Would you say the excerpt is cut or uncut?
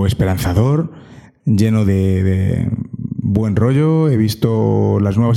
cut